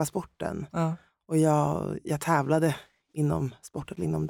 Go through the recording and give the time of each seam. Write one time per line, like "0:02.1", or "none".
none